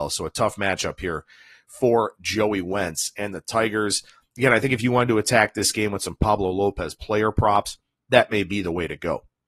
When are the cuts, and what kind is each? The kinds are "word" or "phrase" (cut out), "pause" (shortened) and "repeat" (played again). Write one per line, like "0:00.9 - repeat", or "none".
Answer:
none

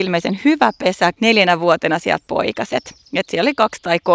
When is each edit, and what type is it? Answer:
0:01.1 - word
0:02.2 - word

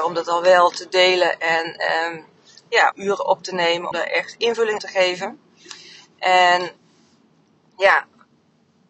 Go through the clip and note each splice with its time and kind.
0:02.9 - word
0:03.9 - word
0:04.8 - word

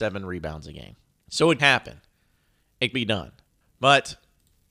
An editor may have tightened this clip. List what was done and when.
0:01.1 - pause
0:01.6 - word
0:02.9 - word
0:03.6 - pause

